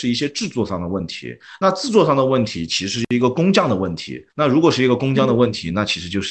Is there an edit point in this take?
yes; 1 cut; at 4.3 s

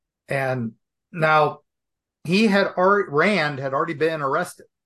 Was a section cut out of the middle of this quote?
no; 0 cuts

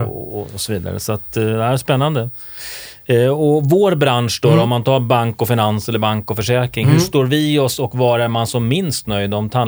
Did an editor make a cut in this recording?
no; 0 cuts

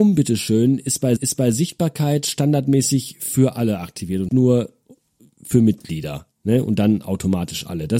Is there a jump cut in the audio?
yes; 3 cuts; at 1.2 s, 4.3 s, 6.3 s

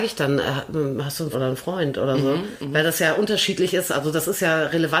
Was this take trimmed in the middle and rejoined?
yes; 1 cut; at 1.3 s

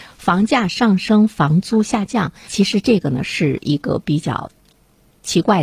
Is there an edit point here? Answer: yes; 1 cut; at 2.5 s

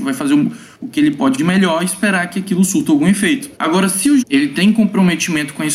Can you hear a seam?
yes; 3 cuts; at 1.4 s, 3.5 s, 4.2 s

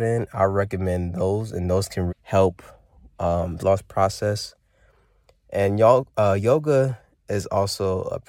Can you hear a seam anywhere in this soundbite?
yes; 2 cuts; at 2.1 s, 3.6 s

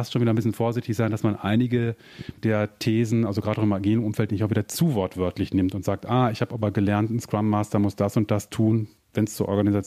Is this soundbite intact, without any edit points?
no; 1 cut; at 2.4 s

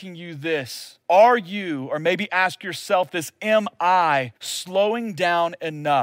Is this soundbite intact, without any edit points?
no; 2 cuts; at 1.0 s, 4.4 s

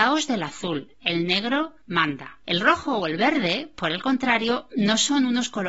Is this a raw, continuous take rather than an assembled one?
no; 1 cut; at 2.4 s

